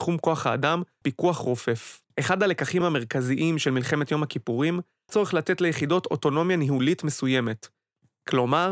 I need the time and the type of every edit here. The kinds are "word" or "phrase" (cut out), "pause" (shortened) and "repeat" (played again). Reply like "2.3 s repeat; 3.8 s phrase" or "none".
1.0 s word; 2.1 s pause; 2.8 s word; 5.1 s word